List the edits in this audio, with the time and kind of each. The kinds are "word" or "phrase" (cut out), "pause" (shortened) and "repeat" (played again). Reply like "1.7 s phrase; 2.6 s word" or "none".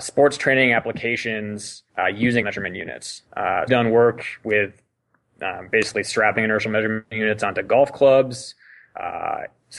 1.9 s pause; 2.4 s word; 3.7 s phrase